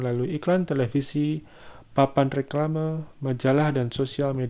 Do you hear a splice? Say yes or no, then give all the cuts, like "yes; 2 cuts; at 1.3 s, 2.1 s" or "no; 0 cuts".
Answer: no; 0 cuts